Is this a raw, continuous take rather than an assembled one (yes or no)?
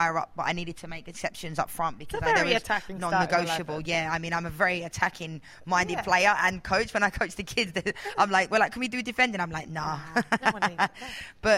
yes